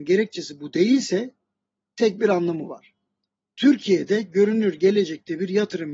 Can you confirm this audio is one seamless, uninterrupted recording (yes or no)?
yes